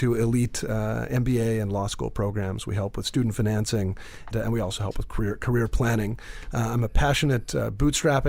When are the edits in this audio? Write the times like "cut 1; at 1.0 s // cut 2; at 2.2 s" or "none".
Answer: cut 1; at 4.3 s